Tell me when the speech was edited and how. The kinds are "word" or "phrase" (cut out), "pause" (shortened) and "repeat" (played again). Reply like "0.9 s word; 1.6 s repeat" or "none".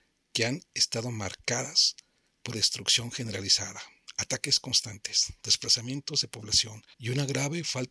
2.5 s word; 6.9 s pause